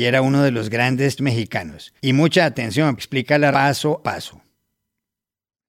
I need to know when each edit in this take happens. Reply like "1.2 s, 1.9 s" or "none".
1.2 s, 2.0 s, 3.0 s, 3.5 s, 4.0 s